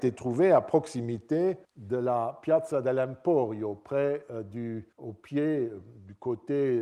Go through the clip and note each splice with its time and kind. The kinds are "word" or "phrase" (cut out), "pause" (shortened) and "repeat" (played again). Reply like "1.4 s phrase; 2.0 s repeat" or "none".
1.6 s pause; 4.9 s pause